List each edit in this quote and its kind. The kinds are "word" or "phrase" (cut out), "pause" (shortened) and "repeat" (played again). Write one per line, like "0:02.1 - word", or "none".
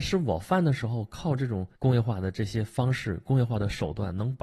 0:01.7 - pause